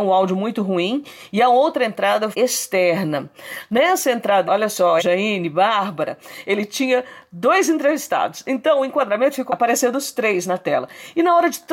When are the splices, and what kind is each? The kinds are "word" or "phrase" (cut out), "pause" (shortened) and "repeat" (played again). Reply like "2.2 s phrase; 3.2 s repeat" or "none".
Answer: 2.3 s word; 4.5 s word; 5.0 s word; 9.5 s word